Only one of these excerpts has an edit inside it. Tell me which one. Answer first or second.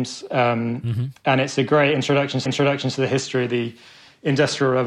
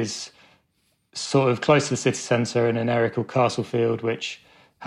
first